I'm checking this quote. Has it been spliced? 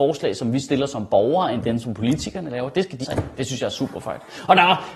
yes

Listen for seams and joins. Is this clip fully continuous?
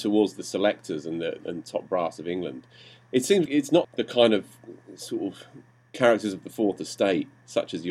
no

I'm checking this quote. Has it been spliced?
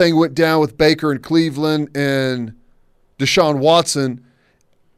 no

